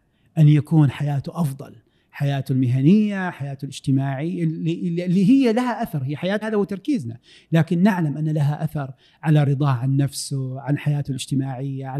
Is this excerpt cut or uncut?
cut